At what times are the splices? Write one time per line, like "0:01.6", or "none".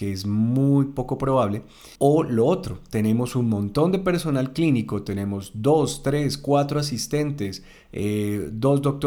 0:02.0